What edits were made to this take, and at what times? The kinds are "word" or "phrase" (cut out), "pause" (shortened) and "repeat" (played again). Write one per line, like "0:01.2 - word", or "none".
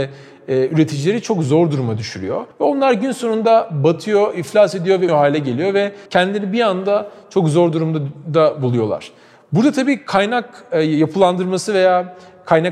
0:02.5 - pause
0:05.1 - word
0:06.1 - pause